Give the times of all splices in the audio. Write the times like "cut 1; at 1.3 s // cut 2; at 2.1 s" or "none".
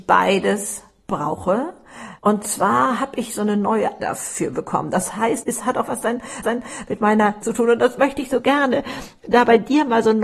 cut 1; at 2.2 s // cut 2; at 4.0 s // cut 3; at 5.4 s // cut 4; at 6.4 s // cut 5; at 7.4 s